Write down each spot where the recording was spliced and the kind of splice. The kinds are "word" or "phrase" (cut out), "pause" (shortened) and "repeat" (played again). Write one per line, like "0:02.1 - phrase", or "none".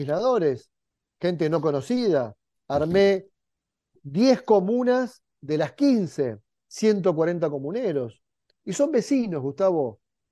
none